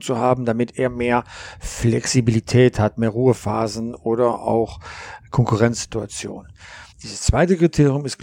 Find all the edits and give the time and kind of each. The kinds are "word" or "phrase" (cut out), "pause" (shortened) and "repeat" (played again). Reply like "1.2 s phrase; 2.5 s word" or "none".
6.9 s pause